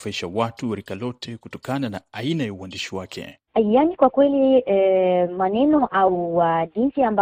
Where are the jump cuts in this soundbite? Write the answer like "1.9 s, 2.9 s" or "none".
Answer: 3.5 s